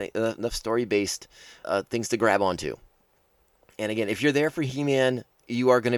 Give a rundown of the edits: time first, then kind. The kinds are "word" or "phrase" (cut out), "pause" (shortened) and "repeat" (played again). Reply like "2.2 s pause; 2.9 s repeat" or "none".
1.6 s word

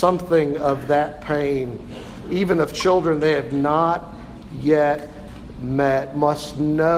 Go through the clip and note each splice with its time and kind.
none

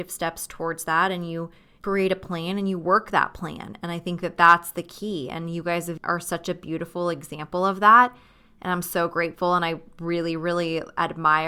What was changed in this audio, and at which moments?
none

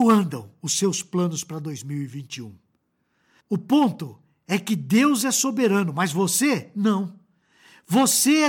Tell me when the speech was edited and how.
none

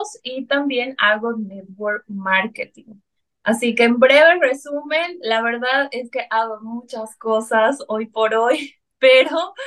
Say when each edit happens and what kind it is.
none

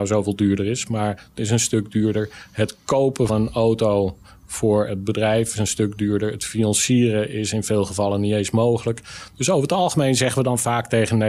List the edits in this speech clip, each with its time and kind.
1.4 s word; 3.3 s word; 5.5 s word

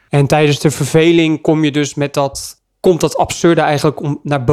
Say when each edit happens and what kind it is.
none

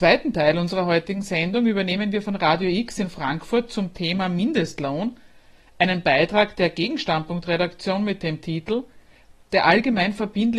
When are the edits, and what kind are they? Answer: none

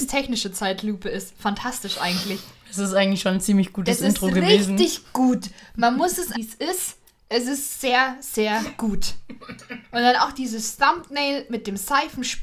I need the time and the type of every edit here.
6.3 s phrase

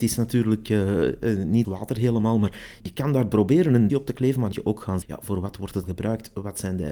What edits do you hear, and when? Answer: 1.6 s word; 2.8 s word; 3.9 s word; 4.5 s word; 5.0 s word; 5.8 s word

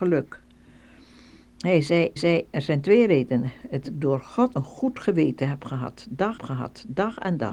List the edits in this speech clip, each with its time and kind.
2.2 s repeat; 3.8 s phrase; 4.5 s word; 6.4 s repeat

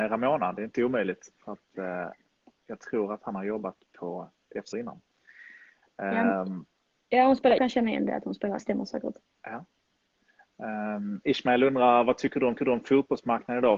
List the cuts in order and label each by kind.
4.7 s word; 7.6 s word; 8.6 s phrase; 12.6 s repeat

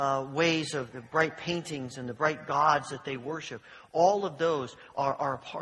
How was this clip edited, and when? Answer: 0.9 s word

